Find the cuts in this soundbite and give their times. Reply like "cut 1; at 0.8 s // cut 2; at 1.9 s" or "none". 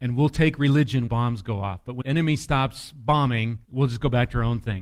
cut 1; at 1.1 s // cut 2; at 2.0 s // cut 3; at 3.6 s